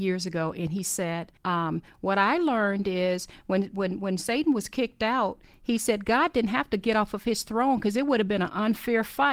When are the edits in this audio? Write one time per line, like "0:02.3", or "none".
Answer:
0:01.4